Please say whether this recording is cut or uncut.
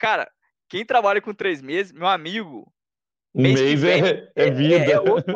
uncut